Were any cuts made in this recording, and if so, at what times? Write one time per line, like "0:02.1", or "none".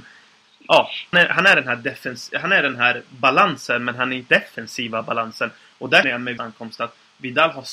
0:01.1
0:04.3
0:06.0
0:06.4